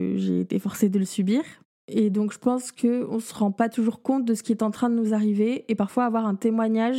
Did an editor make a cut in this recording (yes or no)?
no